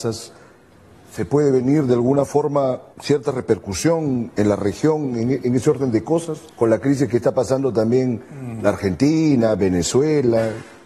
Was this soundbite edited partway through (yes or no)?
yes